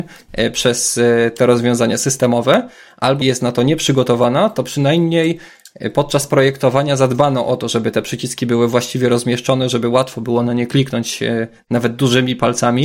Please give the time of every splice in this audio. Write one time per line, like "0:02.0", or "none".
0:03.2